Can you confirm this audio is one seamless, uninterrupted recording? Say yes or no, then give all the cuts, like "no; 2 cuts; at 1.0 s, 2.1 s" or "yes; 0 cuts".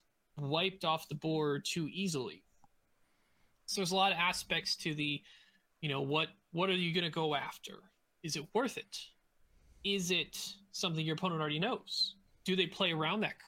yes; 0 cuts